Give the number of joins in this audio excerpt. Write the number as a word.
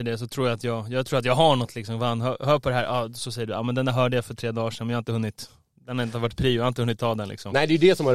zero